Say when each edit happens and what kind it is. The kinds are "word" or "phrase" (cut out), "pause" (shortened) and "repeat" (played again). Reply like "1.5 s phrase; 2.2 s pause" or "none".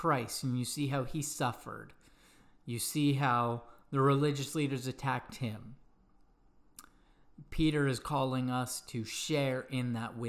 none